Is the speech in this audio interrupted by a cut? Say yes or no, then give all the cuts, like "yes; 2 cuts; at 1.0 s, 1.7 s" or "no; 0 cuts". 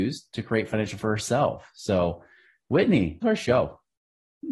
yes; 2 cuts; at 1.0 s, 3.2 s